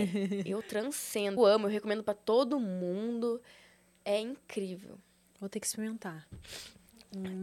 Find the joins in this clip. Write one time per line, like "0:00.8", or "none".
0:01.4